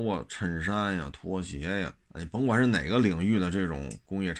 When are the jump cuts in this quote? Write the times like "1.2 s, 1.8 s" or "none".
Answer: 2.0 s